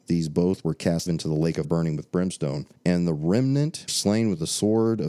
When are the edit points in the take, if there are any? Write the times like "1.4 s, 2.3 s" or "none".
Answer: 1.1 s, 1.6 s, 2.8 s, 3.9 s